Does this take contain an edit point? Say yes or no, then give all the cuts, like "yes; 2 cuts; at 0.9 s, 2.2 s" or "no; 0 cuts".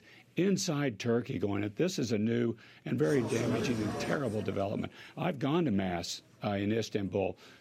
no; 0 cuts